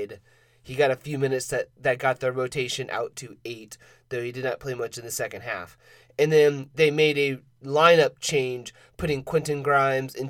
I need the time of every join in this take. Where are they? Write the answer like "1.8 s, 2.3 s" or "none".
none